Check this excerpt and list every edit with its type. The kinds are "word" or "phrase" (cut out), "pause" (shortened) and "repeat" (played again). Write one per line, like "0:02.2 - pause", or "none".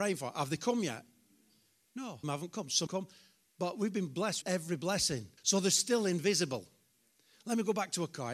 0:02.2 - phrase
0:02.9 - word
0:04.4 - word
0:05.4 - pause